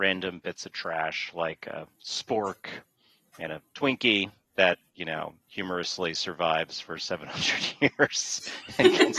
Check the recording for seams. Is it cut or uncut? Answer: cut